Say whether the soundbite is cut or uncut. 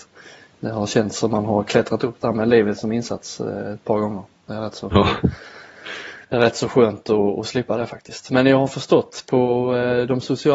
cut